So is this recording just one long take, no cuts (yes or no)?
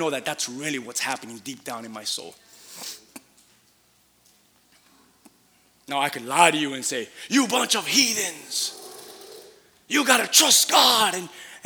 yes